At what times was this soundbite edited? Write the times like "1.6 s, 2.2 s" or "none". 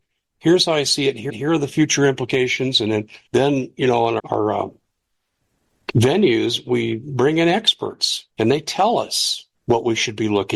1.3 s, 3.3 s, 4.2 s, 8.3 s, 9.5 s